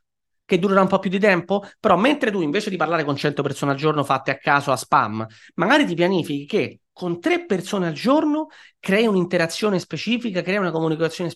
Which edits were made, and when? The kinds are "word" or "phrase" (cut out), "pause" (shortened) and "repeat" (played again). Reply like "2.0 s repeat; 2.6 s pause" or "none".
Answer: none